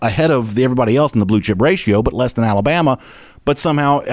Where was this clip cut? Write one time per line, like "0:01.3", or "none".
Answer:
none

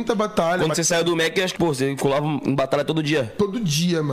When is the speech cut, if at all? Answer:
0:01.6

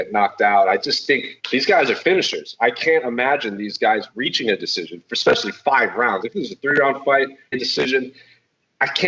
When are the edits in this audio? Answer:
0:01.4
0:07.5

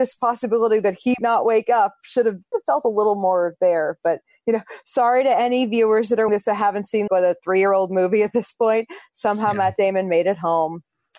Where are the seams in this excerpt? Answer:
0:01.2
0:02.5
0:06.3
0:07.1

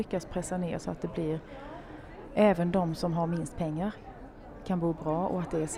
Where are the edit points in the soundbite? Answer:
none

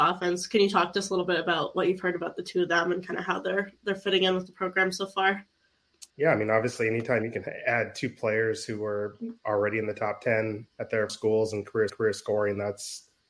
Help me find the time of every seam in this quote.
0:06.1
0:11.1
0:11.9

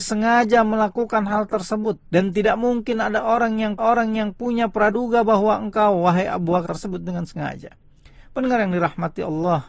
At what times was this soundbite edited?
0:02.1
0:03.8
0:06.6

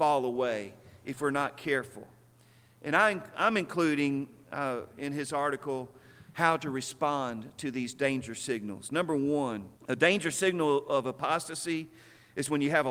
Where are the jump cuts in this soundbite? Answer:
0:09.8

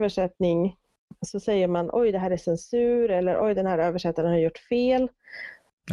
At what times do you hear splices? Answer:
none

